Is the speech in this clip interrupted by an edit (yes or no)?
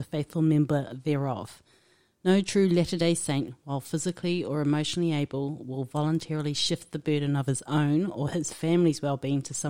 no